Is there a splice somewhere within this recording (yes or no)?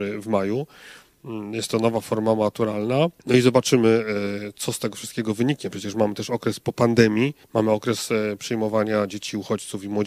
yes